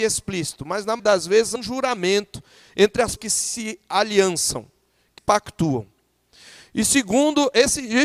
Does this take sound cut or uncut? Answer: cut